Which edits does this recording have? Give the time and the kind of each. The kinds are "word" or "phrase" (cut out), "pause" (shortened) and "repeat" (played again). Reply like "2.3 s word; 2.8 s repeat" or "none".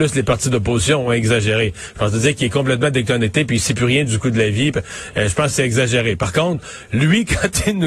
none